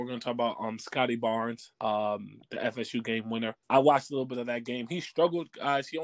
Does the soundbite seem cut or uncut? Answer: cut